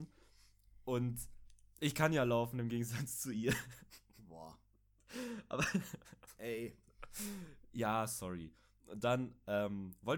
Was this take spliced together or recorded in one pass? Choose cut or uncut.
uncut